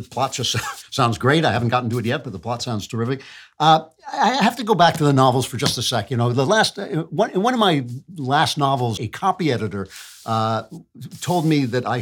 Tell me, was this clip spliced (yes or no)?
yes